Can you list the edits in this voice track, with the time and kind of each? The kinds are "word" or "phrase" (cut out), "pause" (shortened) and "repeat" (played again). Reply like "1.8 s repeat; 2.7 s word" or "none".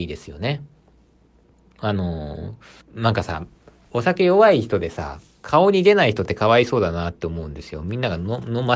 2.8 s pause